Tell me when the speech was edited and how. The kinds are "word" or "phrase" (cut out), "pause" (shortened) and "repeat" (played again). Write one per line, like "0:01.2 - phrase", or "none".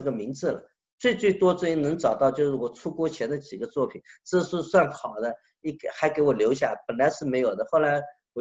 none